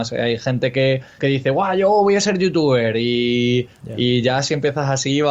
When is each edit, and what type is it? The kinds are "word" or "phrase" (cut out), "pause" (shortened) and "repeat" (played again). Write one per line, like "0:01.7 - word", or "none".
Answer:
0:01.2 - word